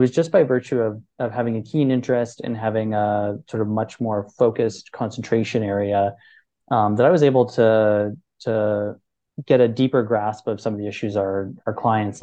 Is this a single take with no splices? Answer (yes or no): yes